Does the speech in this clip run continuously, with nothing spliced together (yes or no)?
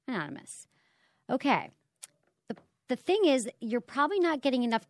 yes